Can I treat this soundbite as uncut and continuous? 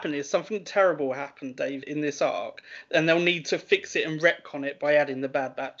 no; 1 cut; at 1.8 s

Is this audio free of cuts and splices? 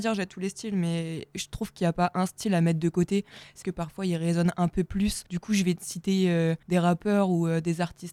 no; 3 cuts; at 3.6 s, 5.3 s, 6.6 s

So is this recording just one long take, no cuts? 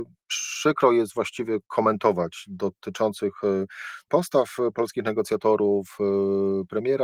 no; 2 cuts; at 1.6 s, 4.1 s

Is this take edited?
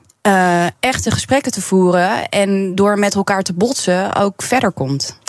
no; 0 cuts

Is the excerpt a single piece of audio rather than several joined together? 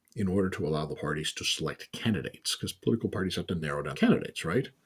no; 2 cuts; at 1.0 s, 3.9 s

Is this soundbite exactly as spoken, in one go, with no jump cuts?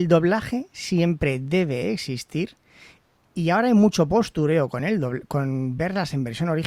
yes; 0 cuts

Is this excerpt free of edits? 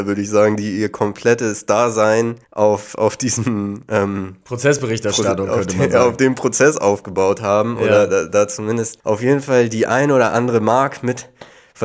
no; 2 cuts; at 2.4 s, 9.0 s

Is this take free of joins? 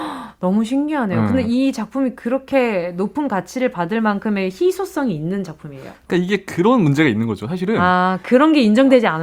yes; 0 cuts

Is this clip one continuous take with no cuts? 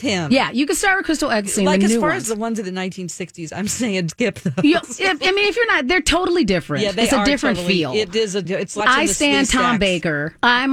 no; 4 cuts; at 4.1 s, 4.8 s, 8.4 s, 8.8 s

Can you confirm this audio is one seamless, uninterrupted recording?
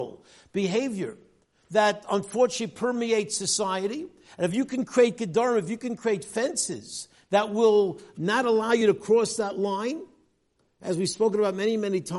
yes; 0 cuts

